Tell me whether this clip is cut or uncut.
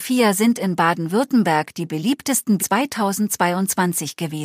cut